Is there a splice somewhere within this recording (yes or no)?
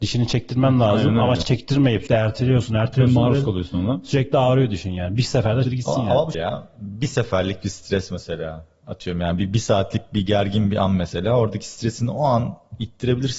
yes